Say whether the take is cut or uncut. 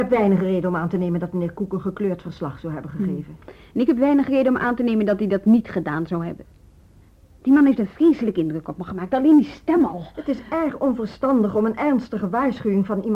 uncut